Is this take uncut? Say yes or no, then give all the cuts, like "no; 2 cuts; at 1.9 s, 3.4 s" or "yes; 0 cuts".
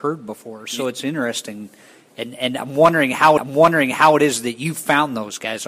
no; 1 cut; at 3.4 s